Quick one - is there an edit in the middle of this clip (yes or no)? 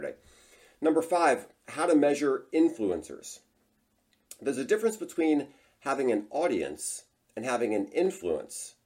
no